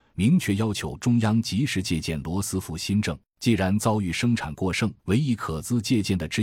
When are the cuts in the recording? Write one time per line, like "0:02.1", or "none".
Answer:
0:05.0